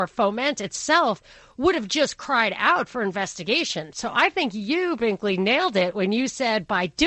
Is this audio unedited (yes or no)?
yes